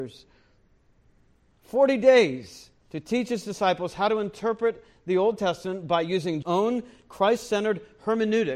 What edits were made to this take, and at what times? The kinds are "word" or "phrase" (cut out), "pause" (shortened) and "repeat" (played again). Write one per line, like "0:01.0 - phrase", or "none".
0:02.8 - pause
0:06.4 - word